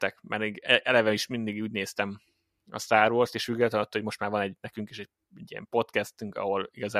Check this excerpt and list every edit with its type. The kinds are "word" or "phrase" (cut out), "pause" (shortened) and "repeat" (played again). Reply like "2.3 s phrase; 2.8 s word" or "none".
none